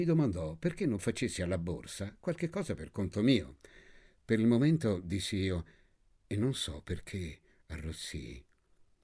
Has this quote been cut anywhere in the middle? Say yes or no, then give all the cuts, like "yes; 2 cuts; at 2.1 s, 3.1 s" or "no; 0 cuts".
no; 0 cuts